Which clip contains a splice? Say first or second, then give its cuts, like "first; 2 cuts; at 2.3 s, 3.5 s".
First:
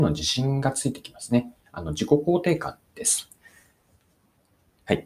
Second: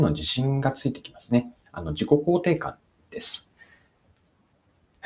first; 1 cut; at 2.9 s